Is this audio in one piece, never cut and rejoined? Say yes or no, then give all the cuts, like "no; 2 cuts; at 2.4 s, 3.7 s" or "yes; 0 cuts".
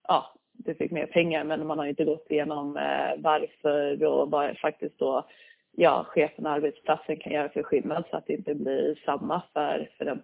yes; 0 cuts